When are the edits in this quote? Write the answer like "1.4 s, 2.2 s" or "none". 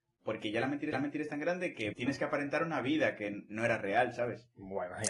0.9 s, 1.9 s